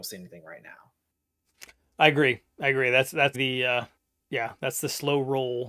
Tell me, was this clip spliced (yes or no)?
yes